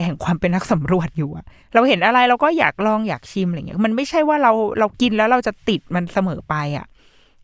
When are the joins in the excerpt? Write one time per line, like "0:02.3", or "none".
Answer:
0:01.6